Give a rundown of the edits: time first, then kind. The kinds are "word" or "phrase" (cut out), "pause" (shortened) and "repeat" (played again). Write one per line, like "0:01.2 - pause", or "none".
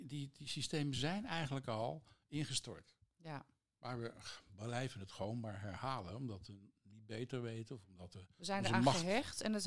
none